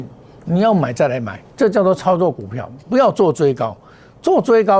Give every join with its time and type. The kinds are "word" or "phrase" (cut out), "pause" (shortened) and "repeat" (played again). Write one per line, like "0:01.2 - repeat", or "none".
0:01.5 - pause
0:02.8 - pause